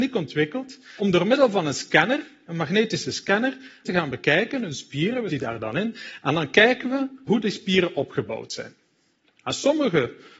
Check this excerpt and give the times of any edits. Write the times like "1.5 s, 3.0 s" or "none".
1.0 s, 3.8 s, 5.3 s, 7.3 s